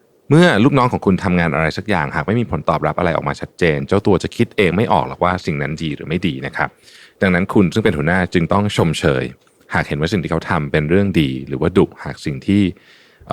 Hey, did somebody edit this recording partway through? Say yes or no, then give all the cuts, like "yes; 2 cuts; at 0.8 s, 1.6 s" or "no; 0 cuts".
no; 0 cuts